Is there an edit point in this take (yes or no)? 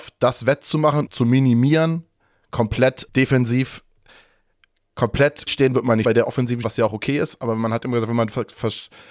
yes